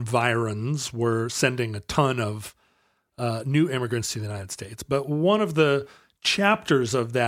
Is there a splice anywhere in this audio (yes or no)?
no